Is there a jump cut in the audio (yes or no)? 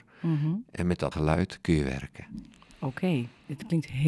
yes